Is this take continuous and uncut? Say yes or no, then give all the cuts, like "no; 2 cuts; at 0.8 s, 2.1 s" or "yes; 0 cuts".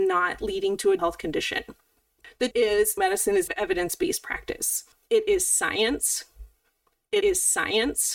no; 5 cuts; at 1.0 s, 2.5 s, 3.0 s, 3.5 s, 7.2 s